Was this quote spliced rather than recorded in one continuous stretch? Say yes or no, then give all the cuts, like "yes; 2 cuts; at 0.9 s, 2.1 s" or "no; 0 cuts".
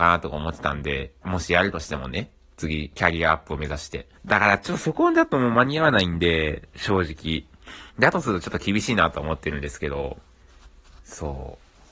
yes; 3 cuts; at 1.2 s, 4.2 s, 7.9 s